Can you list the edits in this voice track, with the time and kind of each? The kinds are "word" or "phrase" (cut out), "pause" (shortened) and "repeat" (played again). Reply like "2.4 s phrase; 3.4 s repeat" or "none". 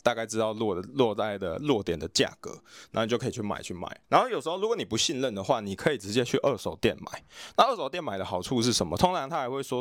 4.0 s pause

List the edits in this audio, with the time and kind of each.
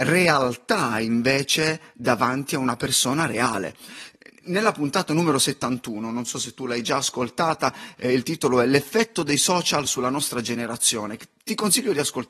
none

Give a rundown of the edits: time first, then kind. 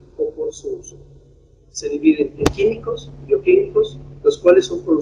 none

